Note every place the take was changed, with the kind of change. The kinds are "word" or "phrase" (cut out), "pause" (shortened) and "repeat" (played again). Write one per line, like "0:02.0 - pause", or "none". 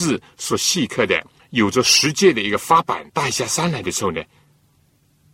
0:01.4 - pause
0:03.1 - pause